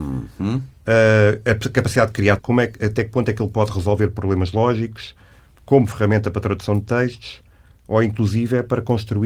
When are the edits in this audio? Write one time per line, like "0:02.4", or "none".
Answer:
0:02.4

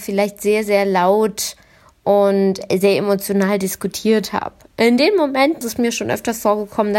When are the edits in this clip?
0:05.6

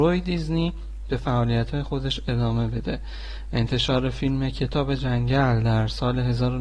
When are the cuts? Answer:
none

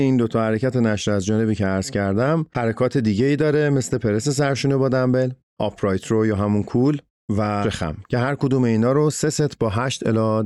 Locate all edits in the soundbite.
0:07.6

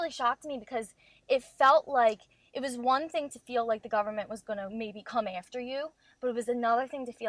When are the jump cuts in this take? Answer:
none

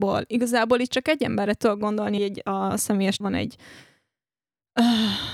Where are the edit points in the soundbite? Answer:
0:02.2
0:03.2

